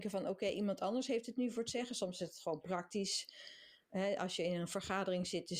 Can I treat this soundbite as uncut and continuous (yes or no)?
yes